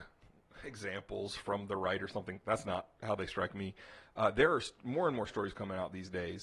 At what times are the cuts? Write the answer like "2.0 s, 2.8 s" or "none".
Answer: none